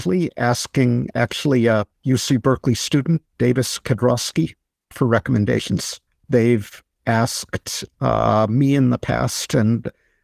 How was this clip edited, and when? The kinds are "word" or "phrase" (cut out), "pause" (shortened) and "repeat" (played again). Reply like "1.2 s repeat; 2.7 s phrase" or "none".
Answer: 2.0 s pause; 4.9 s word; 6.1 s pause